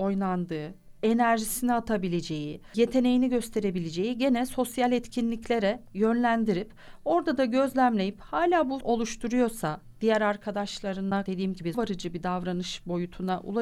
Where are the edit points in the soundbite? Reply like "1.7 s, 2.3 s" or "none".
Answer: 8.8 s, 11.3 s, 11.7 s